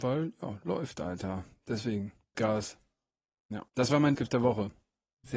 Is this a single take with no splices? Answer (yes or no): no